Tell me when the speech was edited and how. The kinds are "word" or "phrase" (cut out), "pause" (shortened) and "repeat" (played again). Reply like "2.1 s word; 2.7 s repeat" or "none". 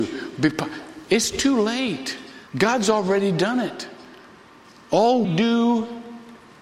2.5 s pause; 5.2 s word